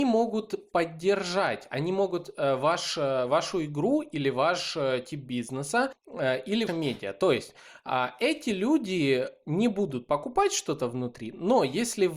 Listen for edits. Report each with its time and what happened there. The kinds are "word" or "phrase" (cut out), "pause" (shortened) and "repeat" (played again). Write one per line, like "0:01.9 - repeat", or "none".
0:06.7 - word

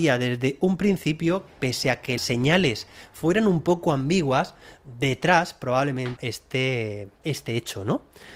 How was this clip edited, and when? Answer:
0:01.5 - word
0:02.2 - word
0:06.2 - word
0:07.2 - word

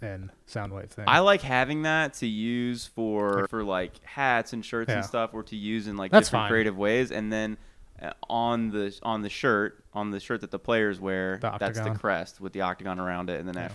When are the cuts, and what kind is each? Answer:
0:03.4 - phrase

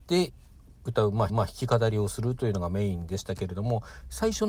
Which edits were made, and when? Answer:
0:01.3 - repeat

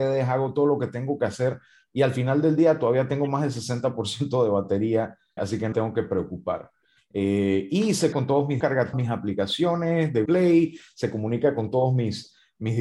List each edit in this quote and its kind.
0:05.4 - word
0:05.7 - word
0:08.1 - word
0:08.6 - word
0:08.9 - word
0:10.3 - word

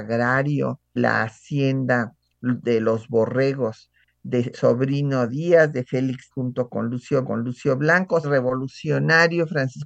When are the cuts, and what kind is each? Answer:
0:01.0 - word
0:04.5 - word
0:05.3 - phrase
0:06.3 - word
0:07.2 - repeat
0:08.2 - phrase

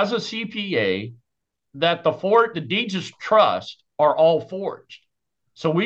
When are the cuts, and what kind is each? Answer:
0:02.5 - word

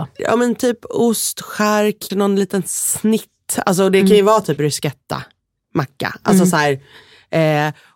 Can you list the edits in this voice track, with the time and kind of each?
0:02.1 - word
0:04.6 - word

